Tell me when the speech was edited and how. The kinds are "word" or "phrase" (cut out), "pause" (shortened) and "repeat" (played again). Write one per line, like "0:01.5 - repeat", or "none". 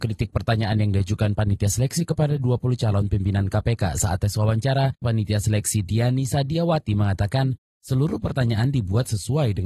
0:05.0 - word